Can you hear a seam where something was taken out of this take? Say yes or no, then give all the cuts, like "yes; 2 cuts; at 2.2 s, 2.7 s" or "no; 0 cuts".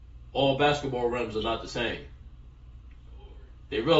no; 0 cuts